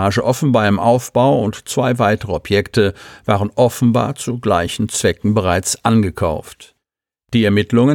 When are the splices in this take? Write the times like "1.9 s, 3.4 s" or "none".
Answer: none